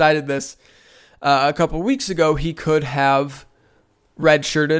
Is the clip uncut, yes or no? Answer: yes